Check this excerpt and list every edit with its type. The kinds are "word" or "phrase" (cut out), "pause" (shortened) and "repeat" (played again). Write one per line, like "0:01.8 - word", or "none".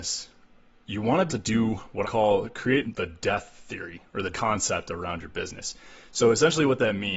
0:01.3 - word
0:02.0 - word
0:02.8 - word
0:04.3 - word